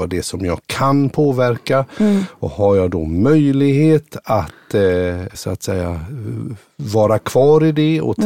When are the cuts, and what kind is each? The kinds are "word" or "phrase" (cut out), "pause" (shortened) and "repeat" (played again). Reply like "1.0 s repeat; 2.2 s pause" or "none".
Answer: 5.3 s word